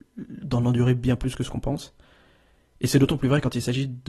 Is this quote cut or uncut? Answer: uncut